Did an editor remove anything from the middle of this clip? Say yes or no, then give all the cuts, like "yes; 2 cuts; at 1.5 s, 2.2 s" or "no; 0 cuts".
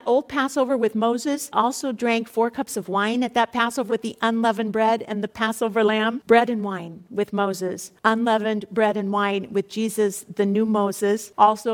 yes; 2 cuts; at 1.5 s, 3.9 s